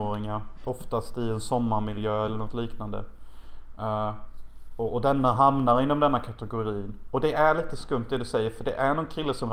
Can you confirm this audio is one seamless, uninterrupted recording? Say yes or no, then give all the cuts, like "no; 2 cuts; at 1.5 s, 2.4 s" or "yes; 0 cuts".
yes; 0 cuts